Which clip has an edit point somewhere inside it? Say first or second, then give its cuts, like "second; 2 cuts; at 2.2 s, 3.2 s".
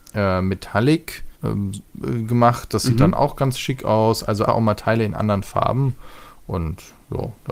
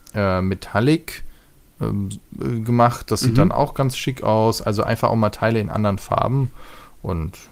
first; 2 cuts; at 1.3 s, 4.5 s